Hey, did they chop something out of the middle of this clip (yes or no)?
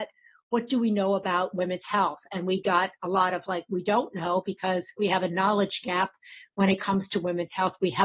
no